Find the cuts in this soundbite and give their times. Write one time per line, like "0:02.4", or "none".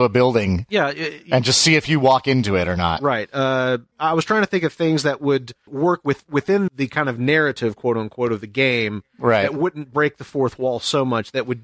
0:05.7
0:06.7

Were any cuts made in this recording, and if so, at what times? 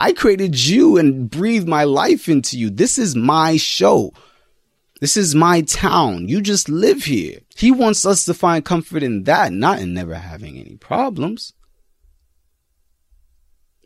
0:07.5

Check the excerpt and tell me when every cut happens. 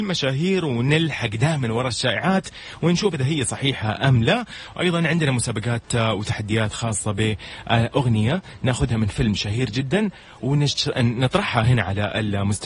none

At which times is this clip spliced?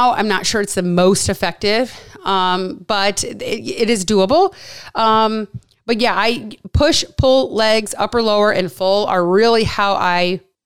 none

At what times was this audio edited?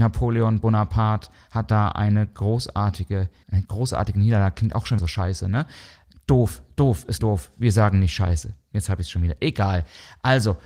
0:03.4
0:05.0
0:07.2

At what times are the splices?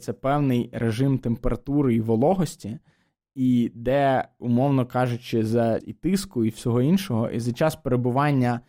0:05.8

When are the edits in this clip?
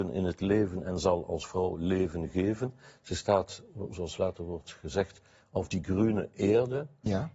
none

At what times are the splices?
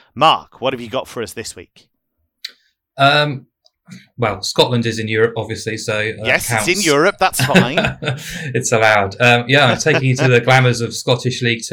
none

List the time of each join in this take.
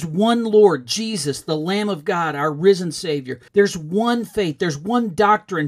0:03.5

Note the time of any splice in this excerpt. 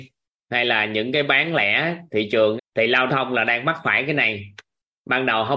0:02.6
0:03.1

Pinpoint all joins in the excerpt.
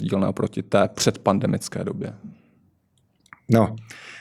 none

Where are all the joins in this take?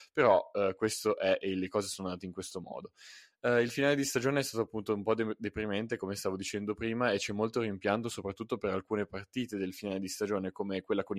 none

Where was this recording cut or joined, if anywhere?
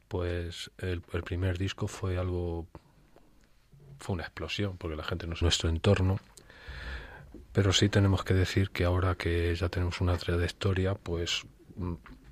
0:01.0
0:05.4

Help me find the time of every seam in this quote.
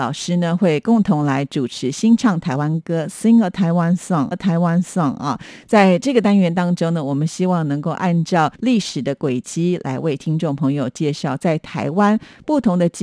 0:04.3
0:08.5

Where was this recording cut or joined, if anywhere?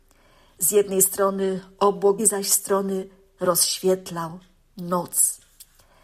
0:02.2

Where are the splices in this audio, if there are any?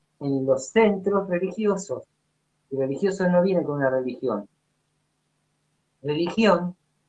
none

